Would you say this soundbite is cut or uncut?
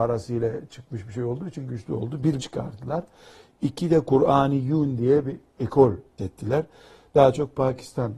cut